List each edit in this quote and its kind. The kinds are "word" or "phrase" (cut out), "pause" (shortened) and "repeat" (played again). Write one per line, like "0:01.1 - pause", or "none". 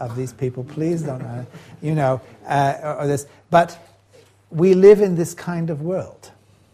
none